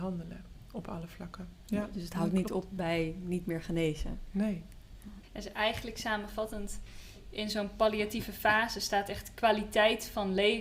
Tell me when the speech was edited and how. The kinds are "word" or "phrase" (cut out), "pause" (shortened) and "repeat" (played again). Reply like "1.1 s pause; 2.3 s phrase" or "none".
none